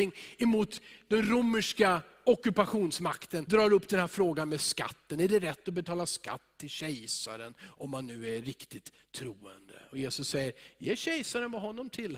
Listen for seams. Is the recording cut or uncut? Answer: cut